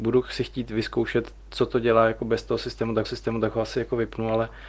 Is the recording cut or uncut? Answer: cut